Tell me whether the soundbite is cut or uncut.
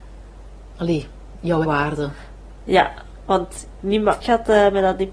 cut